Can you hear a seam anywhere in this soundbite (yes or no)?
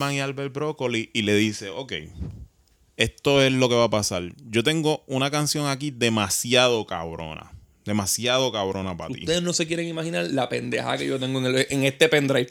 no